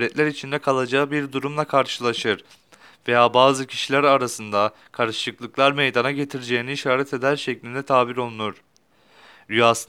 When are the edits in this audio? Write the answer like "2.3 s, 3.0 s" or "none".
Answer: none